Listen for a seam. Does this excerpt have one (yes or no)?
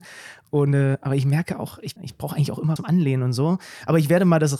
yes